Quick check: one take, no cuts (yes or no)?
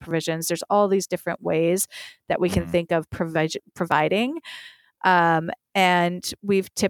yes